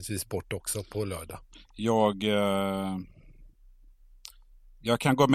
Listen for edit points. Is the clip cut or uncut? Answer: uncut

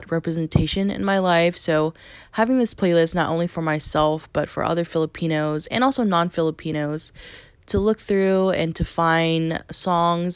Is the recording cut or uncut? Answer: uncut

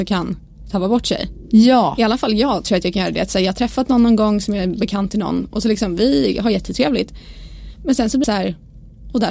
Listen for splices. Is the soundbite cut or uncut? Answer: cut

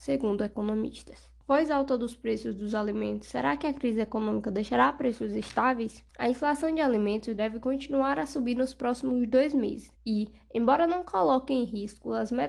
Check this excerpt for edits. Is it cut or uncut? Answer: cut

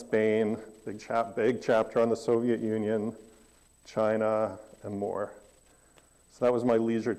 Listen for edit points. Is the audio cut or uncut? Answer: uncut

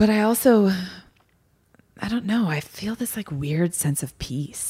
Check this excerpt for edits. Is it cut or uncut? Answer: uncut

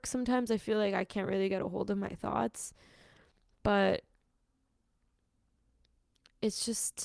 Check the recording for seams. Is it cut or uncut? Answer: uncut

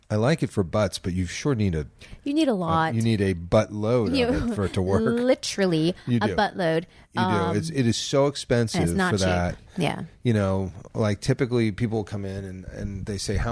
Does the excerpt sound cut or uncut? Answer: uncut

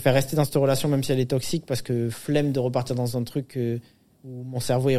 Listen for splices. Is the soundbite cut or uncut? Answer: uncut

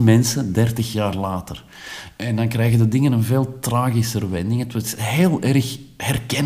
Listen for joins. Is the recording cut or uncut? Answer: uncut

